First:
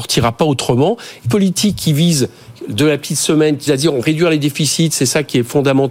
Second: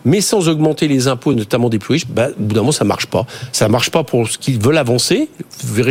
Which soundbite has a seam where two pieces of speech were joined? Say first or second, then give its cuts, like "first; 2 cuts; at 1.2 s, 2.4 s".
first; 3 cuts; at 1.2 s, 3.7 s, 4.0 s